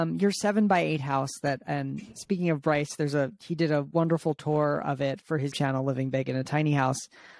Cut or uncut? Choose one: cut